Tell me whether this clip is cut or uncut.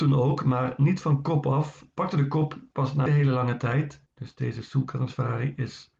cut